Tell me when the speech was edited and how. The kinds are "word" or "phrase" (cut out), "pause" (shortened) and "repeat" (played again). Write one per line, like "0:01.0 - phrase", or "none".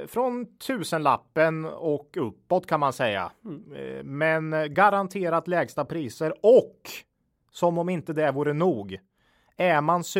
none